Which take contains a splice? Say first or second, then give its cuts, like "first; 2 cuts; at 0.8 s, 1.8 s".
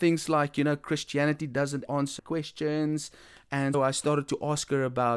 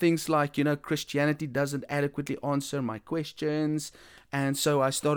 first; 3 cuts; at 1.9 s, 2.2 s, 3.7 s